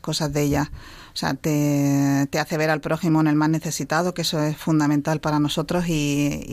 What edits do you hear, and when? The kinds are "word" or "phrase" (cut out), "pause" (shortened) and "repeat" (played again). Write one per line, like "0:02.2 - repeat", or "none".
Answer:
none